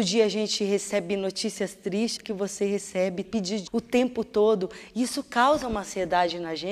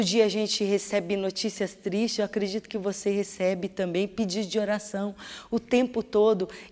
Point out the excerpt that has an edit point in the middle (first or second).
first